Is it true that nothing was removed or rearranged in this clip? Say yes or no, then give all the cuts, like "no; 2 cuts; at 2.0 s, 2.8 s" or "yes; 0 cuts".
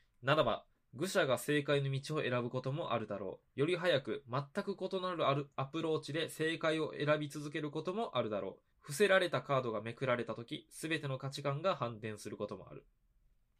no; 2 cuts; at 3.5 s, 8.7 s